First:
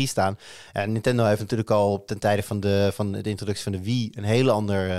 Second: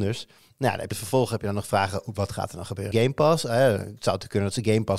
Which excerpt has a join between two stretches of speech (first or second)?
second